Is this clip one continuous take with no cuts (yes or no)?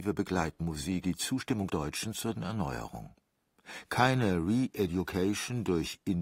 no